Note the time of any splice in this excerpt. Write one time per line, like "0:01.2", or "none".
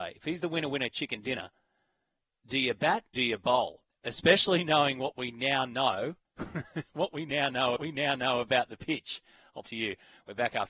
0:03.1
0:03.9
0:06.2
0:07.8
0:09.6